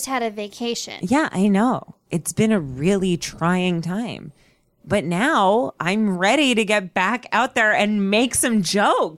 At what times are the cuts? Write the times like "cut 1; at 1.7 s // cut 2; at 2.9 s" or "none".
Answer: none